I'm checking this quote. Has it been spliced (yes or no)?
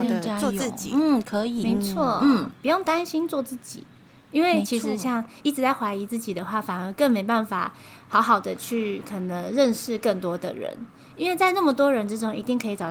no